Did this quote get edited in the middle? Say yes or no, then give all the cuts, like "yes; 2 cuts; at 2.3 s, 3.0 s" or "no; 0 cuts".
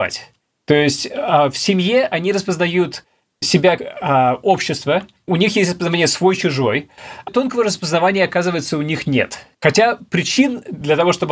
yes; 3 cuts; at 3.8 s, 7.3 s, 9.5 s